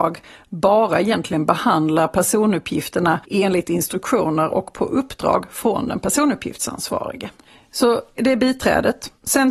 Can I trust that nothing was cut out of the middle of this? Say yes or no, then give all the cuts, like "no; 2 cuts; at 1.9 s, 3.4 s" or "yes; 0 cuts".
no; 2 cuts; at 3.2 s, 8.2 s